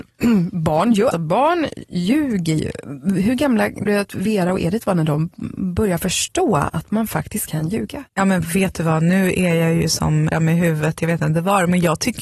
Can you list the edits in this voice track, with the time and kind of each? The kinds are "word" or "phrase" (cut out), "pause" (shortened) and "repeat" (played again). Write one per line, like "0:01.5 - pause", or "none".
0:01.1 - word
0:03.9 - word
0:08.1 - pause
0:10.3 - phrase